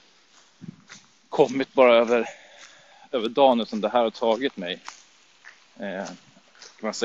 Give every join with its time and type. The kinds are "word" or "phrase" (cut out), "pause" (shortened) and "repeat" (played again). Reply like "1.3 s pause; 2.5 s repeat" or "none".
none